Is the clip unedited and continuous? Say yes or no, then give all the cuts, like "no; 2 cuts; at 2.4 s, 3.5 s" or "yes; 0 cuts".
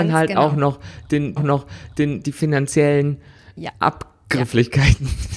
no; 2 cuts; at 1.4 s, 3.6 s